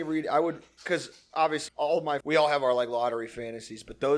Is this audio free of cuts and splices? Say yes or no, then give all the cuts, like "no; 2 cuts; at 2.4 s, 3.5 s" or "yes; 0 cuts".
no; 2 cuts; at 1.7 s, 2.2 s